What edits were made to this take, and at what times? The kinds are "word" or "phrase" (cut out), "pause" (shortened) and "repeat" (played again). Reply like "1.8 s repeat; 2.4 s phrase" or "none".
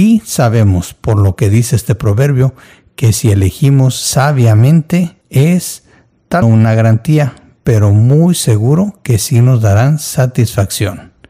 5.2 s pause; 6.4 s phrase